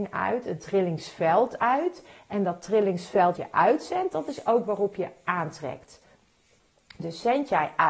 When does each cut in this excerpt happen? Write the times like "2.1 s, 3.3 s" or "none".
3.4 s